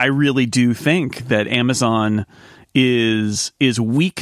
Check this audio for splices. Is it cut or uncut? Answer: uncut